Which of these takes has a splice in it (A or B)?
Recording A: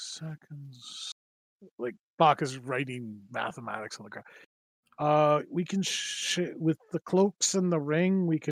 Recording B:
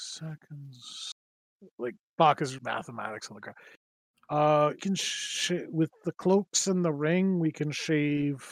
B